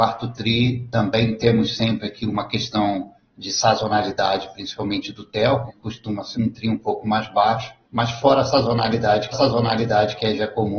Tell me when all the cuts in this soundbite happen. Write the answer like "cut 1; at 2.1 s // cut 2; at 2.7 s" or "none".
cut 1; at 5.7 s // cut 2; at 6.3 s // cut 3; at 7.8 s // cut 4; at 9.3 s